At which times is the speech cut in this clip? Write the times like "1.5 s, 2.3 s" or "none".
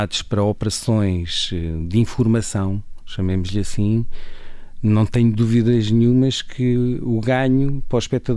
none